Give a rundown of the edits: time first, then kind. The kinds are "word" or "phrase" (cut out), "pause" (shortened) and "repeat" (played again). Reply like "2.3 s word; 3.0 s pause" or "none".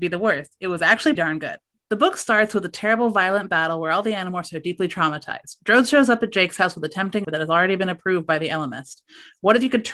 1.2 s word; 1.7 s pause; 7.2 s word